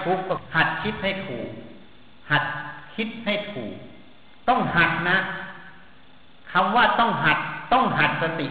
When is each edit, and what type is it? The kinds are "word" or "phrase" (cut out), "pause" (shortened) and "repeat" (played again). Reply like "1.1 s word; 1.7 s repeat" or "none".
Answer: 2.2 s pause